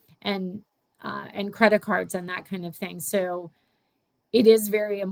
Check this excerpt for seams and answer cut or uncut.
uncut